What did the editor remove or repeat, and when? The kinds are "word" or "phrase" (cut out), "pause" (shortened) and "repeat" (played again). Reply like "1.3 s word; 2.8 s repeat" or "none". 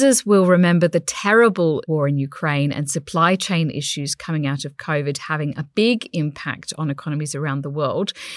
none